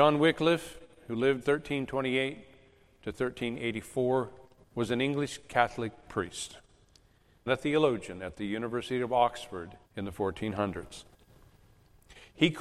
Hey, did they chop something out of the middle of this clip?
yes; 4 cuts; at 1.4 s, 4.6 s, 7.5 s, 9.8 s

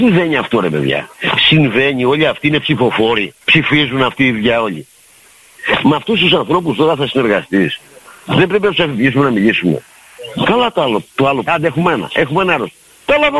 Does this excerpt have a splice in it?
yes; 3 cuts; at 1.1 s, 3.4 s, 11.5 s

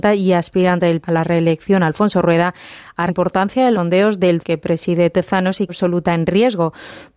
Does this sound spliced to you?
yes; 5 cuts; at 1.0 s, 3.1 s, 3.7 s, 4.4 s, 5.7 s

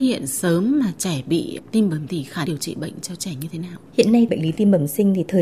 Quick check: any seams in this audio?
yes; 4 cuts; at 2.1 s, 2.5 s, 3.9 s, 4.3 s

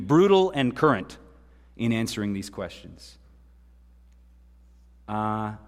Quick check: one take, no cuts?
yes; 0 cuts

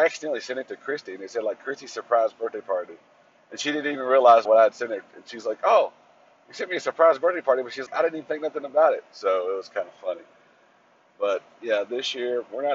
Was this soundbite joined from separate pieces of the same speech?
yes; 2 cuts; at 4.5 s, 7.9 s

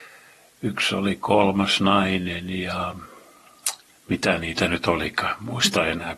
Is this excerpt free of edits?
no; 1 cut; at 3.9 s

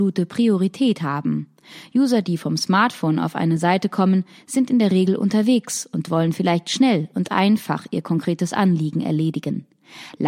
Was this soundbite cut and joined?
no; 0 cuts

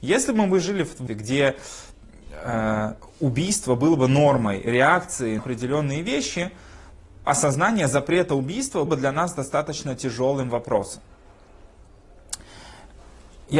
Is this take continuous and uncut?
no; 4 cuts; at 1.1 s, 5.4 s, 7.3 s, 8.9 s

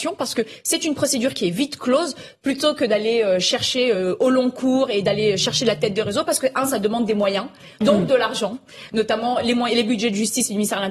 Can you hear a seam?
no; 0 cuts

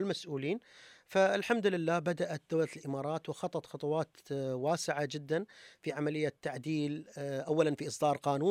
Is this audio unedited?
yes; 0 cuts

